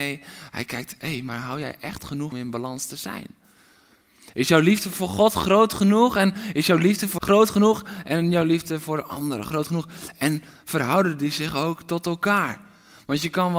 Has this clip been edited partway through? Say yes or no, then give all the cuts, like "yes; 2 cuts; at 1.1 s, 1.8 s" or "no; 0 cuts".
yes; 2 cuts; at 2.3 s, 7.2 s